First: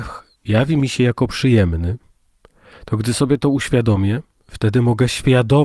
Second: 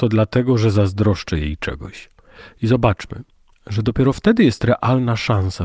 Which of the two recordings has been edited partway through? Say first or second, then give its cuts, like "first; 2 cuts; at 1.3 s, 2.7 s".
second; 1 cut; at 3.5 s